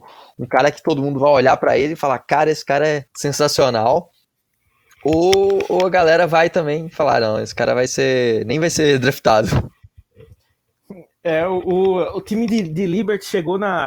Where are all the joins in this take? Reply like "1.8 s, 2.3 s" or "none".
3.1 s